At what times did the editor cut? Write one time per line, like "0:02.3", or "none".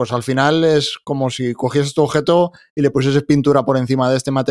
none